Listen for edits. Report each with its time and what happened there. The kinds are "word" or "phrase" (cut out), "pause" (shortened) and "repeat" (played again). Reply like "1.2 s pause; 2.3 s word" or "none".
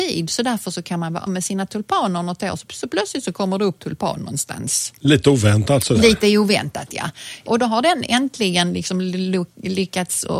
1.3 s word; 2.7 s word; 3.8 s word